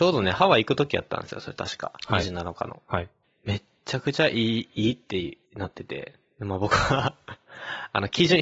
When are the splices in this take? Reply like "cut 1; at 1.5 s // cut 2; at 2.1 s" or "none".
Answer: cut 1; at 3.2 s // cut 2; at 5.5 s